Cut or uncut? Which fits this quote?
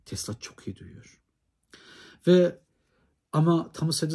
uncut